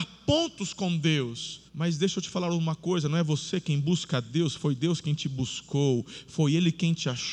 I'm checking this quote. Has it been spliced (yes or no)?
yes